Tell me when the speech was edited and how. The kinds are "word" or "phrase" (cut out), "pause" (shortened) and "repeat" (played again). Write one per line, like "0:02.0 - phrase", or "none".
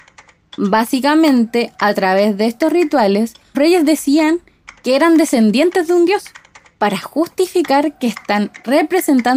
0:03.5 - word